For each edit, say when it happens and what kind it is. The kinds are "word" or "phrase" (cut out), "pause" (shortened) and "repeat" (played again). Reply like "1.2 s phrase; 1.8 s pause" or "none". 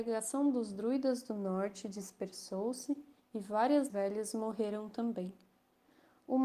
3.2 s pause; 3.9 s phrase